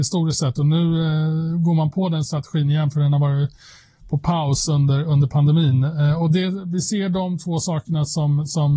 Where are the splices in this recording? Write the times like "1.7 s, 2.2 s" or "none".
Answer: none